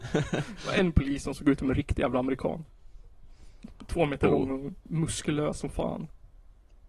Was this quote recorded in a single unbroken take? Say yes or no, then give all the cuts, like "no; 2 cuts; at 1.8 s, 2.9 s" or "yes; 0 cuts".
yes; 0 cuts